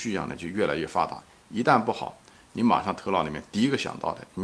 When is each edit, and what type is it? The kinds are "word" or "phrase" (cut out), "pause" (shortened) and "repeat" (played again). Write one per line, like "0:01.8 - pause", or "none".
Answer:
none